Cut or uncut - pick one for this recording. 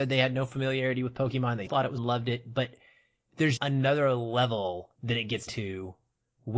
cut